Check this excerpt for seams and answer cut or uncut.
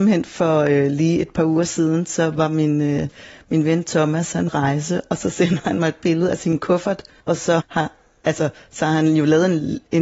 cut